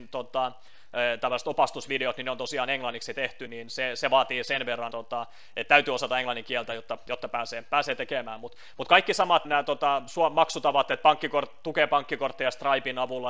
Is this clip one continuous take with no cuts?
no; 3 cuts; at 3.5 s, 4.9 s, 9.4 s

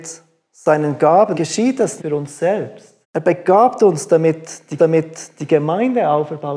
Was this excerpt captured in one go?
no; 4 cuts; at 1.3 s, 2.0 s, 3.0 s, 4.8 s

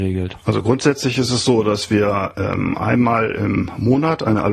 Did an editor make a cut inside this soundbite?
no; 0 cuts

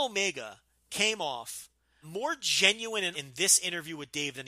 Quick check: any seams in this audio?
yes; 2 cuts; at 2.0 s, 3.1 s

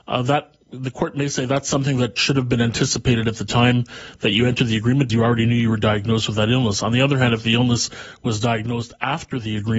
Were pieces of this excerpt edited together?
yes; 1 cut; at 5.1 s

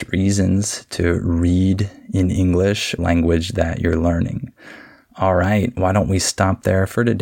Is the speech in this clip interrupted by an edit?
yes; 1 cut; at 3.0 s

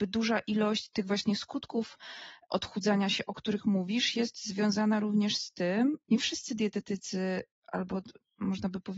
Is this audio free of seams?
no; 1 cut; at 6.0 s

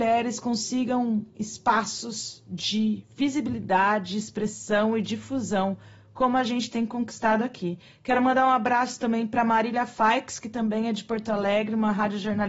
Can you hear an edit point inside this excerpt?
no; 0 cuts

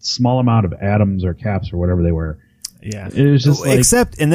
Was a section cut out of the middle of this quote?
yes; 1 cut; at 3.1 s

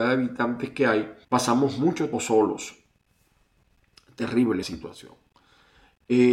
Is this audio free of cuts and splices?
no; 3 cuts; at 1.2 s, 2.1 s, 4.6 s

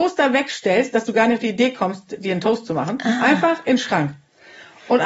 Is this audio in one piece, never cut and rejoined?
yes; 0 cuts

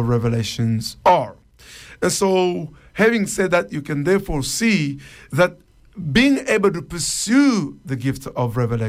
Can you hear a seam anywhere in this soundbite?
yes; 1 cut; at 1.0 s

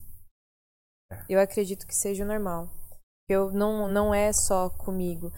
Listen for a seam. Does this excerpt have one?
no; 0 cuts

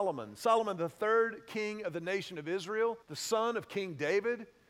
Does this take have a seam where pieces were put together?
yes; 1 cut; at 3.0 s

